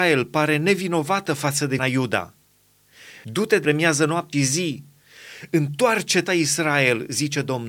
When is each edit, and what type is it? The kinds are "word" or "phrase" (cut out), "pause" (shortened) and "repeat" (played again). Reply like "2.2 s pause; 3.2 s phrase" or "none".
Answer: 1.8 s word; 3.6 s phrase; 4.3 s word; 6.3 s word